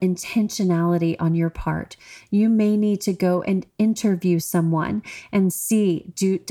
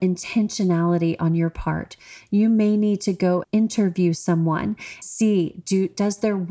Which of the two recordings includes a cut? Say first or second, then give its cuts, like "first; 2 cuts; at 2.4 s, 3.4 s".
second; 2 cuts; at 3.4 s, 5.0 s